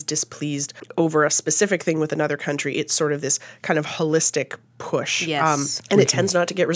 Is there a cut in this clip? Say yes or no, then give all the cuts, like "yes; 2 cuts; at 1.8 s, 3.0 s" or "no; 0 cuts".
no; 0 cuts